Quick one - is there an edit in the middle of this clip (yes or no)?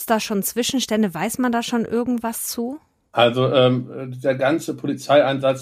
no